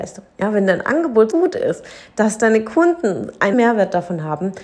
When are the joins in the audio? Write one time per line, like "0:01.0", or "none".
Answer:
0:01.3
0:03.5